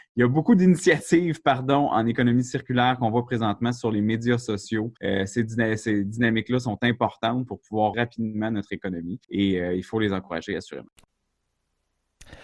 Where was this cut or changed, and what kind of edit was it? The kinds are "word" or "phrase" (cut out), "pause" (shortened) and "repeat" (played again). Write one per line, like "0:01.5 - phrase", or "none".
0:05.0 - pause
0:07.9 - word
0:09.2 - pause